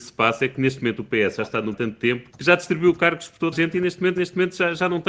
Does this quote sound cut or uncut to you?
cut